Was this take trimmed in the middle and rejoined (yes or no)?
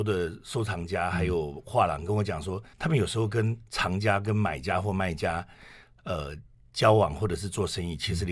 yes